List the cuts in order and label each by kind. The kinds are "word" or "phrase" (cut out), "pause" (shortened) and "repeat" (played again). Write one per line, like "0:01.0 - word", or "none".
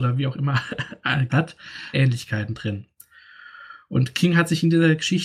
0:01.3 - word
0:01.9 - phrase